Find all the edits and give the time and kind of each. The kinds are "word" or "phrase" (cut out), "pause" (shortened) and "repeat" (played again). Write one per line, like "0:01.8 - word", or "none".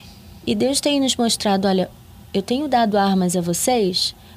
none